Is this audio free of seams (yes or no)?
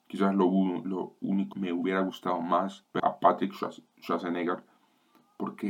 no